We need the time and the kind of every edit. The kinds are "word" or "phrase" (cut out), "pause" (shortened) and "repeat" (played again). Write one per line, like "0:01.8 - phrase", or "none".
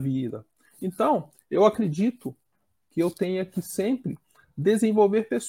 none